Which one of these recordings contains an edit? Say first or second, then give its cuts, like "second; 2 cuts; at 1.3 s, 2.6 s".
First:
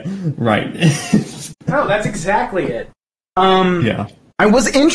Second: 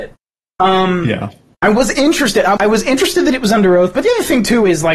second; 1 cut; at 2.6 s